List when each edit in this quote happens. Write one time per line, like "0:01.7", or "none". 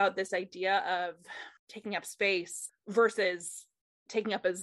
0:01.6
0:02.7

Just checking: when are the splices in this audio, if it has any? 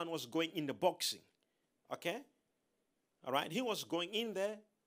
none

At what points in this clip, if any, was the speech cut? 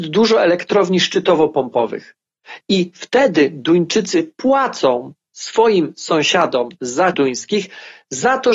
0:07.1

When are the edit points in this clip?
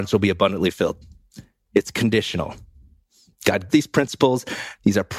0:03.7

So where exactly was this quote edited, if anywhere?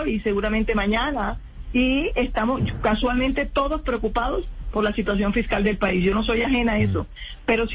none

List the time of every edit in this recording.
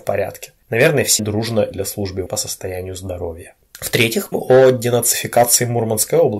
0:01.2
0:01.7
0:02.3
0:04.3

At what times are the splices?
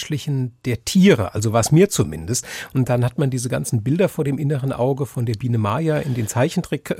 none

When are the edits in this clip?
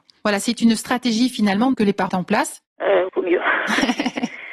0:01.7
0:02.1
0:03.1

